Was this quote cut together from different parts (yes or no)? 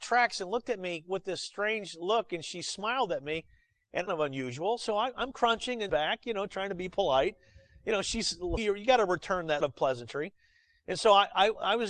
yes